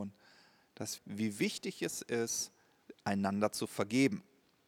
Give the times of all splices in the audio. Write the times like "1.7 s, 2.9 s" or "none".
1.0 s